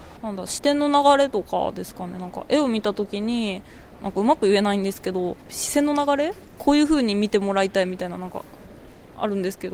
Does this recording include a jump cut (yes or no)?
yes